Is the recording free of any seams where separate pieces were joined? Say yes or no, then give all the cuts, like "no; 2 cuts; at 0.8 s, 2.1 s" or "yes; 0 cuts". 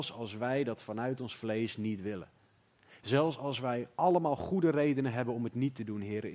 yes; 0 cuts